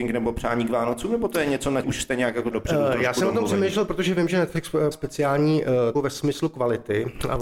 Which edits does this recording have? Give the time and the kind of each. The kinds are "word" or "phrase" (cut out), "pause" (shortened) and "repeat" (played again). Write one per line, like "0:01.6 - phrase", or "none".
0:01.8 - word
0:02.5 - word
0:04.9 - word
0:05.9 - word